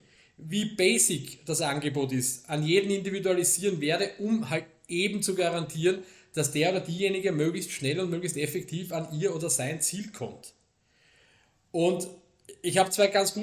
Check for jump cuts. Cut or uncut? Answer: uncut